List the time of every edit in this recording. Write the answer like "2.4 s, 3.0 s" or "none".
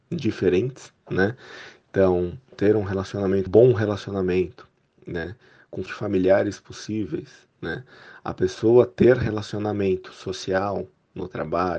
2.5 s, 3.5 s, 4.8 s, 5.9 s, 7.5 s